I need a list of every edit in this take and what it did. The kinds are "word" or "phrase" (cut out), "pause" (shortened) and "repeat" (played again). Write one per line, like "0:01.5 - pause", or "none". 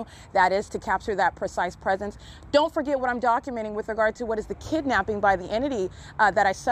none